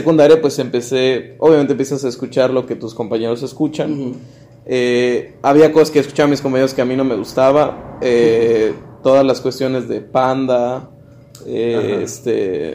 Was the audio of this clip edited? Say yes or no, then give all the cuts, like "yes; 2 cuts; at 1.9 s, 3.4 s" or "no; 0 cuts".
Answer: no; 0 cuts